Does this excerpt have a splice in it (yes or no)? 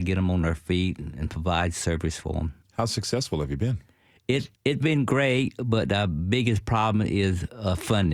yes